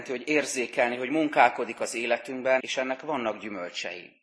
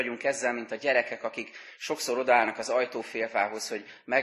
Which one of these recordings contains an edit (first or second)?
first